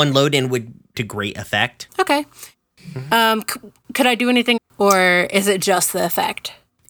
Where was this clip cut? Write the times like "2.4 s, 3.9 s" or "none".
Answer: 0.9 s, 1.9 s, 3.8 s, 4.6 s